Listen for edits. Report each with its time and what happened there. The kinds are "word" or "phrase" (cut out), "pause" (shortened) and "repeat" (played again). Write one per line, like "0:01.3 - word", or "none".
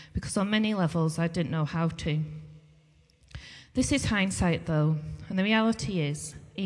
none